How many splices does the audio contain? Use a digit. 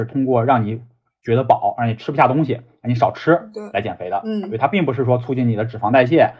0